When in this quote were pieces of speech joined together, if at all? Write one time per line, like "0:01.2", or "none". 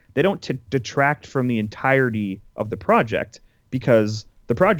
none